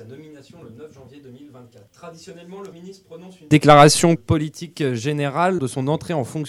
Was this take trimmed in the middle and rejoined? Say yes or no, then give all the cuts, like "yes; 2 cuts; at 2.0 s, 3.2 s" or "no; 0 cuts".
yes; 4 cuts; at 1.9 s, 2.7 s, 4.2 s, 5.6 s